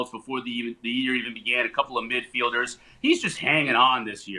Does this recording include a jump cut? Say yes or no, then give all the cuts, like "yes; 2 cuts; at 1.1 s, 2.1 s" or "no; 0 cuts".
no; 0 cuts